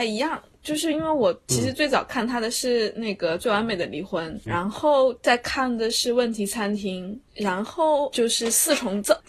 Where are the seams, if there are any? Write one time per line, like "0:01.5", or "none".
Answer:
0:04.5

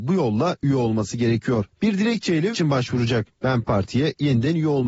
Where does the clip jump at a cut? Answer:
0:02.5

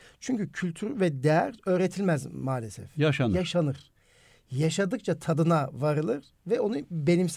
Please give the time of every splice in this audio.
none

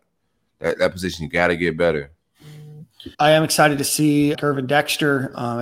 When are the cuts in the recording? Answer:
0:03.1
0:04.3

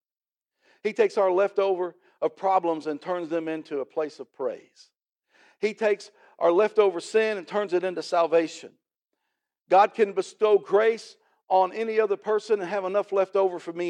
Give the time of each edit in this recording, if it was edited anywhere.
none

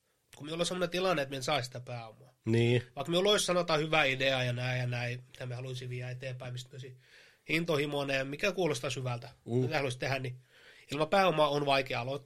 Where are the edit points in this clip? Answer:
none

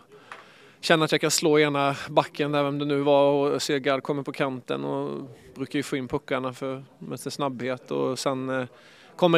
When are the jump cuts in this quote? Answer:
none

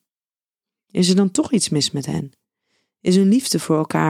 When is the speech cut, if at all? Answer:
none

